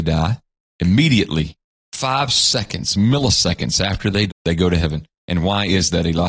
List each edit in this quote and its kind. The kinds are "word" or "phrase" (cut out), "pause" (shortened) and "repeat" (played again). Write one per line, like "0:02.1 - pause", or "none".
0:04.3 - word